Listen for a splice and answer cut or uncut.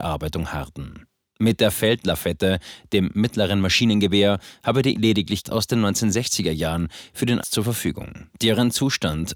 cut